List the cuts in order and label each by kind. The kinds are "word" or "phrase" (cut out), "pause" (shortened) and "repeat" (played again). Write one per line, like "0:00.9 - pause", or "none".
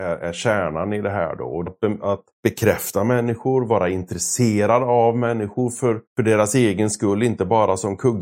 0:01.7 - phrase
0:02.3 - pause
0:06.1 - pause